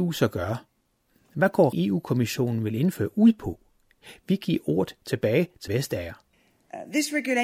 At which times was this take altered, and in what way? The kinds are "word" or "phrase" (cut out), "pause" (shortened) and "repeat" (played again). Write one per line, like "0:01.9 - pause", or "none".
0:01.7 - word
0:05.7 - word